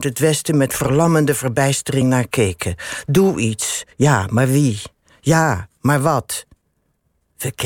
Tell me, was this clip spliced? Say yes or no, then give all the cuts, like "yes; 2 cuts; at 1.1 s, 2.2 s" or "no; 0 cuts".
no; 0 cuts